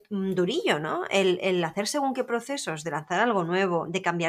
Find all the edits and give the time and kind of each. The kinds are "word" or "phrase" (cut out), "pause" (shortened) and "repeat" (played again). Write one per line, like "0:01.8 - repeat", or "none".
none